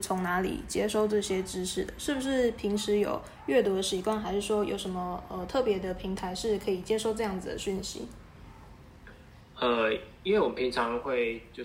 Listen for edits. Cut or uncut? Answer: uncut